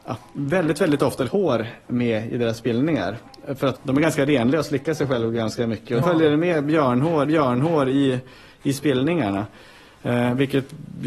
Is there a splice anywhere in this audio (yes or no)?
yes